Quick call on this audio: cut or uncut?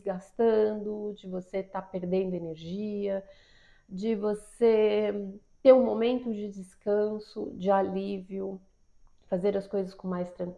uncut